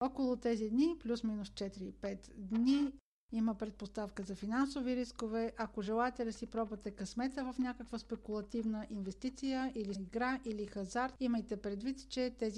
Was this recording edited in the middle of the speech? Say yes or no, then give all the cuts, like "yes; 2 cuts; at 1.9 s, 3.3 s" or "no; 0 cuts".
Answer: yes; 1 cut; at 9.9 s